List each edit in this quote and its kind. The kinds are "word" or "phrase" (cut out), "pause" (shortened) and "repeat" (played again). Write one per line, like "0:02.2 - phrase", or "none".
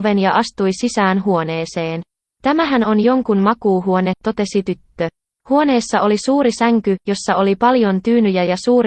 none